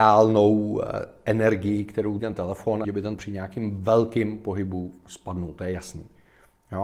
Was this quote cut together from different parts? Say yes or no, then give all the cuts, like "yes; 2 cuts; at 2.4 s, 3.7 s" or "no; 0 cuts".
yes; 3 cuts; at 2.2 s, 2.8 s, 3.2 s